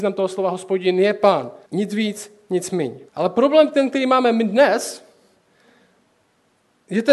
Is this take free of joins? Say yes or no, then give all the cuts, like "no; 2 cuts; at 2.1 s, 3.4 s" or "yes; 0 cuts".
no; 2 cuts; at 1.6 s, 3.1 s